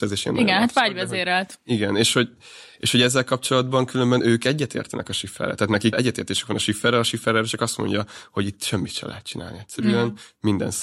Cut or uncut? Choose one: cut